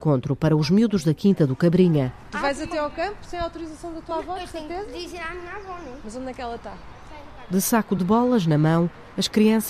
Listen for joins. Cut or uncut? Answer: uncut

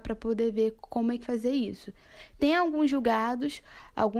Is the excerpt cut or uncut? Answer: cut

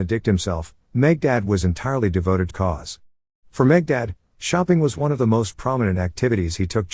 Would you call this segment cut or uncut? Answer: cut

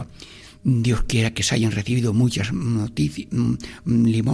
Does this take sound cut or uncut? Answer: uncut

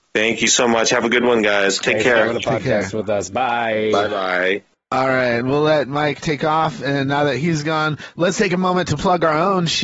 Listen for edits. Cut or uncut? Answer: uncut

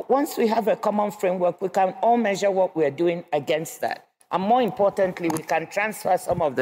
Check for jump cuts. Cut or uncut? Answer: uncut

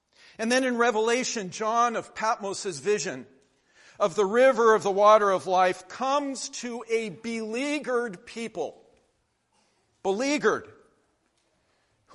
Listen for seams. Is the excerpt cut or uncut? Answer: uncut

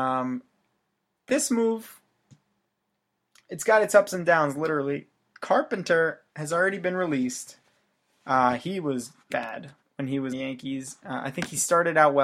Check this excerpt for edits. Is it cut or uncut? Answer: cut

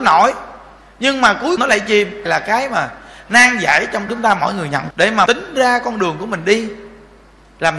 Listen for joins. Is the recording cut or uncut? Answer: cut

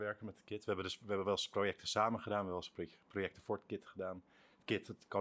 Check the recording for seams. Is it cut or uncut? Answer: uncut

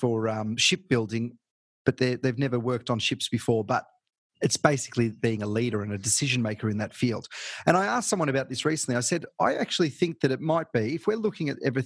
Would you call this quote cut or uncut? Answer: uncut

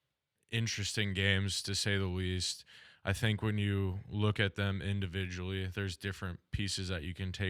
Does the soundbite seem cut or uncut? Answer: uncut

